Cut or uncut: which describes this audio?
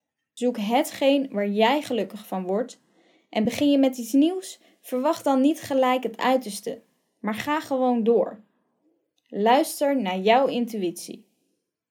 uncut